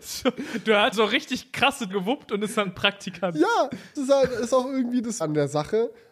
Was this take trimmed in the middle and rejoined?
yes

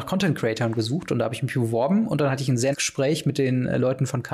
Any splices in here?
yes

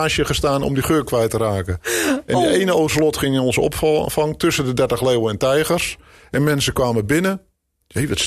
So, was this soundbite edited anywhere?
no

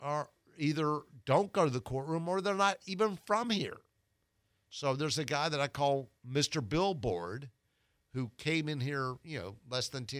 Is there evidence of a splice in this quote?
no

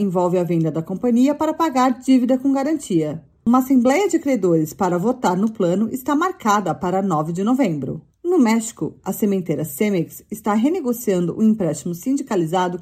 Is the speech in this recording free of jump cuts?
no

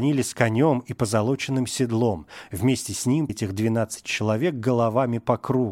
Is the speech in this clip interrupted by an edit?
yes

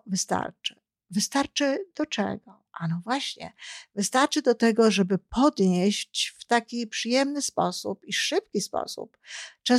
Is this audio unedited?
yes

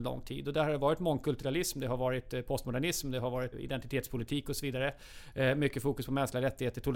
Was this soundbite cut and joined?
yes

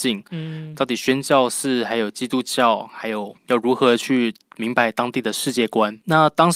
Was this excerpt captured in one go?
no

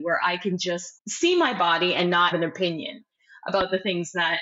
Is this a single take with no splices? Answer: no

